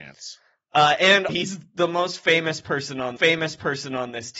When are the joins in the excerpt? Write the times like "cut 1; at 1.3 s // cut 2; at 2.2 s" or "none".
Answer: cut 1; at 1.3 s // cut 2; at 3.2 s